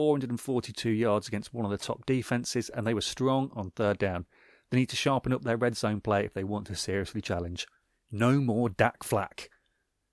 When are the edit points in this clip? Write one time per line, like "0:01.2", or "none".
none